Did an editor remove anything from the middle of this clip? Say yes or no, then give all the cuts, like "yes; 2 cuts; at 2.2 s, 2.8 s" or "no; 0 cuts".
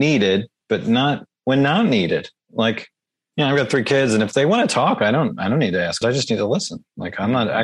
yes; 2 cuts; at 3.0 s, 6.0 s